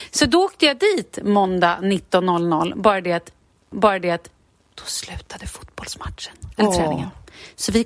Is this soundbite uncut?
no; 1 cut; at 3.7 s

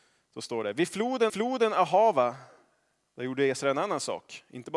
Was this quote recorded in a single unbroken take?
no; 1 cut; at 1.3 s

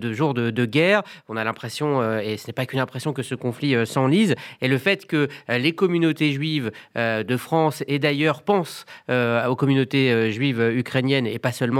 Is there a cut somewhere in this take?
no; 0 cuts

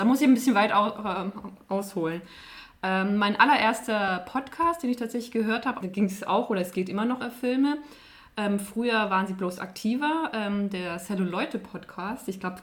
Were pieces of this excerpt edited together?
yes; 2 cuts; at 5.8 s, 7.2 s

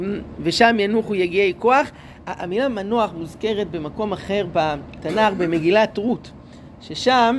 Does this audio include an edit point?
no; 0 cuts

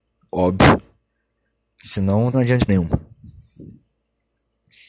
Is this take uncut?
no; 2 cuts; at 2.3 s, 2.7 s

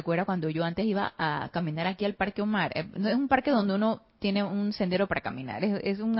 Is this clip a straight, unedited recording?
yes; 0 cuts

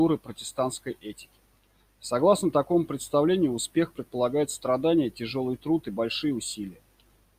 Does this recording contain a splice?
no; 0 cuts

